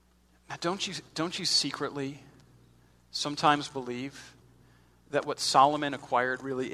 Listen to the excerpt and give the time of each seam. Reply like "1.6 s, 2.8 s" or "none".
none